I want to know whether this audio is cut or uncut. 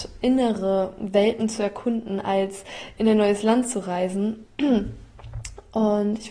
uncut